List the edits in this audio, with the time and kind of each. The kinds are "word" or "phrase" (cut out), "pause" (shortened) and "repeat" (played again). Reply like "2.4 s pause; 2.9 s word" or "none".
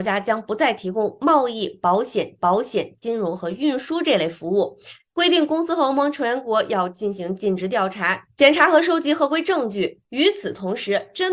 2.4 s repeat